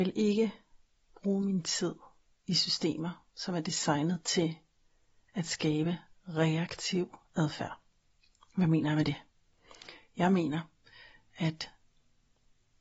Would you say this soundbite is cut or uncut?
uncut